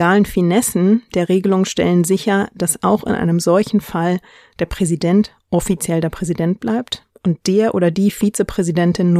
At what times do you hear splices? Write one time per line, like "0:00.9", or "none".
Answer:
none